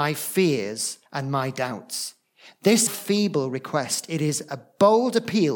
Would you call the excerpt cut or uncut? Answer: cut